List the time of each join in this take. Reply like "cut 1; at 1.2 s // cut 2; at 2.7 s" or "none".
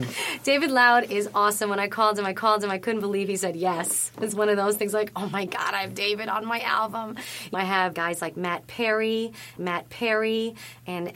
cut 1; at 2.3 s // cut 2; at 7.5 s // cut 3; at 7.9 s // cut 4; at 9.6 s